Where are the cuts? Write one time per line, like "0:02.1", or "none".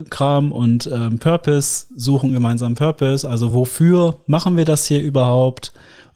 none